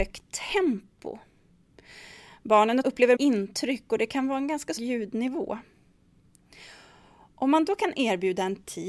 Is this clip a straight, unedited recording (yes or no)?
no